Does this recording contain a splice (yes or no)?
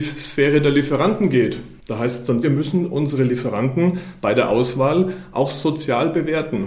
yes